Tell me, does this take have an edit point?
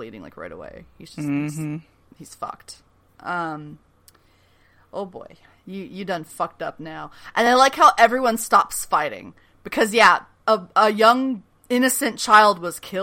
no; 0 cuts

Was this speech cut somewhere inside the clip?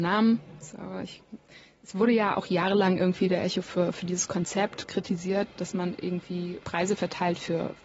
no; 0 cuts

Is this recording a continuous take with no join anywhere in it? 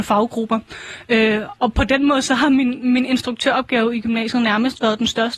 yes; 0 cuts

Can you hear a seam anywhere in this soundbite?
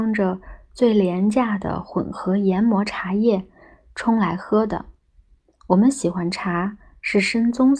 no; 0 cuts

